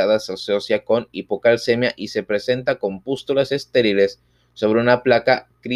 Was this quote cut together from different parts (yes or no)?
no